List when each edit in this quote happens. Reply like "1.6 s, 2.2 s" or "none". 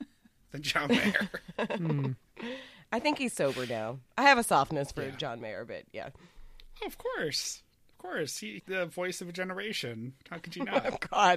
8.6 s